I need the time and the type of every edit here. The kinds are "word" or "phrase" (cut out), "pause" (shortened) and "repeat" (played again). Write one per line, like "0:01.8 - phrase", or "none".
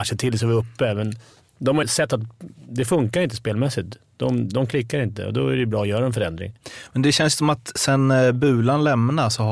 0:01.8 - word